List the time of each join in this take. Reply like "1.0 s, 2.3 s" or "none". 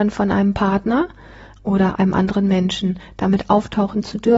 none